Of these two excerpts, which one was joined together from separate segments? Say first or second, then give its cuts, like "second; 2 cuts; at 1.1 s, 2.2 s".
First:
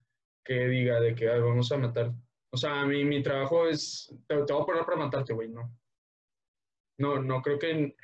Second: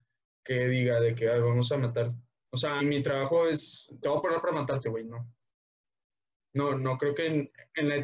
second; 2 cuts; at 2.8 s, 4.0 s